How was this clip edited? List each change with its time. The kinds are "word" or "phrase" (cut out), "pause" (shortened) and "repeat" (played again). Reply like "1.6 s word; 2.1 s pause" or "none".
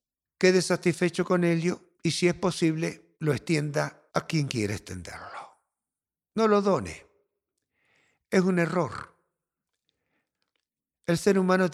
1.9 s pause; 3.1 s pause; 4.1 s pause